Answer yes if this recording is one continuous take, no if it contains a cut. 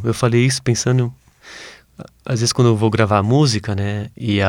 yes